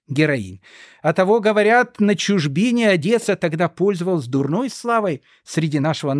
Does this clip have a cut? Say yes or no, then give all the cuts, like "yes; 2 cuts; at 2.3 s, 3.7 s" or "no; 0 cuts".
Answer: no; 0 cuts